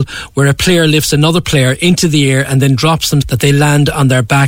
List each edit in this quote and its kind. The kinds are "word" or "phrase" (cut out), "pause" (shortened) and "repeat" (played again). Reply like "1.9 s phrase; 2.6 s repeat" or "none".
3.2 s word